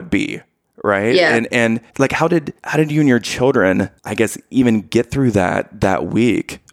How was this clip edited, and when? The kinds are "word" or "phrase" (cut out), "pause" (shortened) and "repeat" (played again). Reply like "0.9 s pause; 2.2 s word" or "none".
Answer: 1.9 s pause; 2.6 s pause; 4.0 s pause